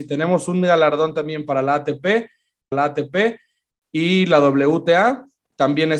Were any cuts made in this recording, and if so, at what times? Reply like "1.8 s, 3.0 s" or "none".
2.7 s